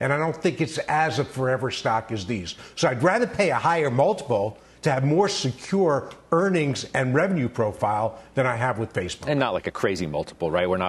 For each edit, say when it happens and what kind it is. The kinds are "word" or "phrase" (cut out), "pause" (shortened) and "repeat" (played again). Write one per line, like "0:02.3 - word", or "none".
none